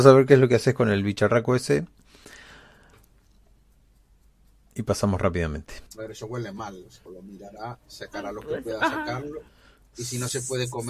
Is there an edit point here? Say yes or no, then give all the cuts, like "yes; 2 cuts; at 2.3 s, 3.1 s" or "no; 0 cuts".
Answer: yes; 2 cuts; at 5.9 s, 7.1 s